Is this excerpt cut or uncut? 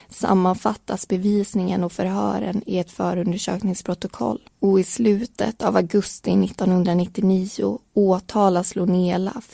cut